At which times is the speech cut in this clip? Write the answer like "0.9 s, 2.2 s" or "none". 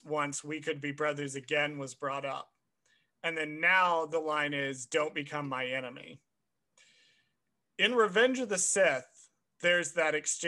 none